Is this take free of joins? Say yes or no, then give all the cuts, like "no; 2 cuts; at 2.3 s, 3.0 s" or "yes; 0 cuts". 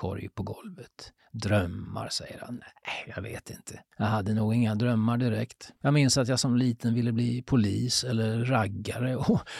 no; 1 cut; at 5.8 s